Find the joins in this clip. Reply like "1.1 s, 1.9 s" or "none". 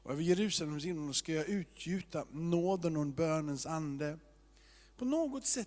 none